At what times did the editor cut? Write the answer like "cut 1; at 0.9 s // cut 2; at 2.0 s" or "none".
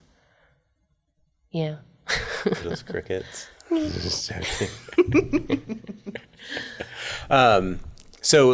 cut 1; at 2.6 s